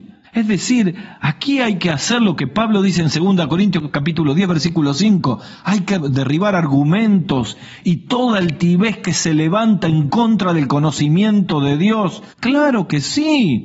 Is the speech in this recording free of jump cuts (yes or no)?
no